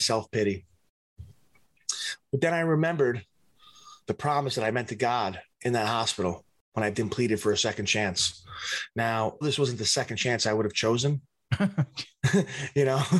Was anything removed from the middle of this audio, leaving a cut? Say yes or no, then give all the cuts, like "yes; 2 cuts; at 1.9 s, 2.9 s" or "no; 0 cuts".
yes; 4 cuts; at 4.0 s, 5.5 s, 6.9 s, 9.4 s